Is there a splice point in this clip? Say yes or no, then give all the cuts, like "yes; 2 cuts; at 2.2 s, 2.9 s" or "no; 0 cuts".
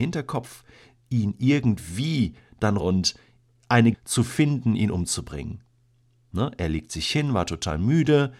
yes; 2 cuts; at 2.8 s, 3.9 s